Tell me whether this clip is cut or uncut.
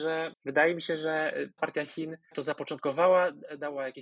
cut